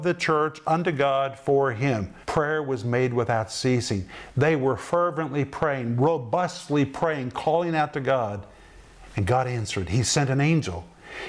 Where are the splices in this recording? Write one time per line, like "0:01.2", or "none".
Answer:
0:02.2